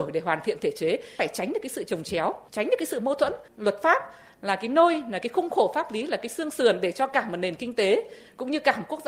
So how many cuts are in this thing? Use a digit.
0